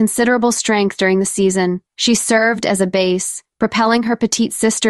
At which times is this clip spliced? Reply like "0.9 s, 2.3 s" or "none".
1.9 s, 3.5 s